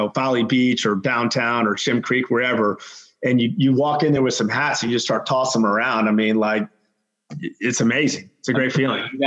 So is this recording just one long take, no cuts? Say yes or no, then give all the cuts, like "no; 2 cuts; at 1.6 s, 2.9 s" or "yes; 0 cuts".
yes; 0 cuts